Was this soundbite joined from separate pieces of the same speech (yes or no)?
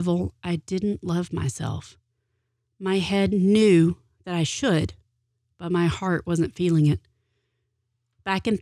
no